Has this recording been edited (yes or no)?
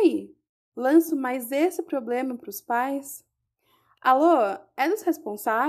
no